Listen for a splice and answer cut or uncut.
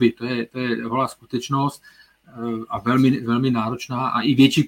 uncut